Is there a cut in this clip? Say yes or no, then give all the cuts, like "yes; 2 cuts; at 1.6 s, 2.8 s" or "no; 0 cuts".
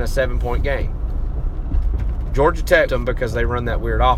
yes; 1 cut; at 2.9 s